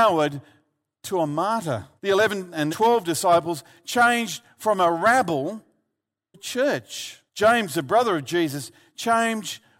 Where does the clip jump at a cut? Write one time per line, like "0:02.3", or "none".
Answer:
0:02.0
0:02.7
0:06.3
0:07.3